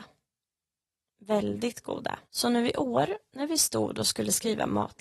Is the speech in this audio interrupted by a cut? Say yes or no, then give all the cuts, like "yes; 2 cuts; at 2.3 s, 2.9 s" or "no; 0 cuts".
yes; 1 cut; at 2.3 s